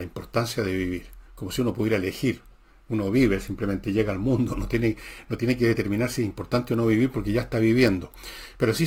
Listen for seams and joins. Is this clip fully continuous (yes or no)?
no